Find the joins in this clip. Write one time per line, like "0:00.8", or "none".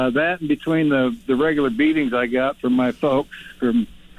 none